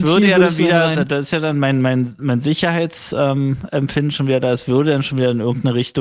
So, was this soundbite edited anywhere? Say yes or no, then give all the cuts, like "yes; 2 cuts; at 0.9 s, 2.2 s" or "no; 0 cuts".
no; 0 cuts